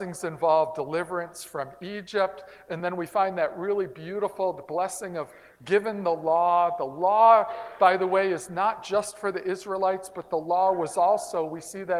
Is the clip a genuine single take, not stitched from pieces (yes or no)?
yes